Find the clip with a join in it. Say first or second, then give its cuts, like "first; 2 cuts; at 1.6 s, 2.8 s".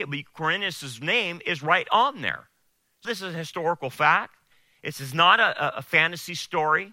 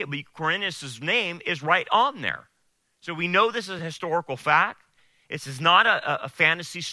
first; 1 cut; at 3.0 s